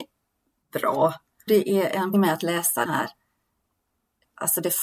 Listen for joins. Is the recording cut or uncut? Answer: cut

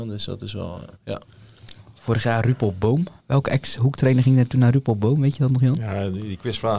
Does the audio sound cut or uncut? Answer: cut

